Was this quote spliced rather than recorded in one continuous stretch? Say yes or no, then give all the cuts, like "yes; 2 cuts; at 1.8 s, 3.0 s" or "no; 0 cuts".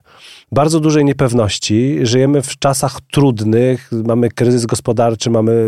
no; 0 cuts